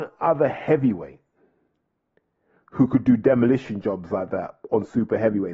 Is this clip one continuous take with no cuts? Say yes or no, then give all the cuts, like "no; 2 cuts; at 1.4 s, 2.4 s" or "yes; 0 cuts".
yes; 0 cuts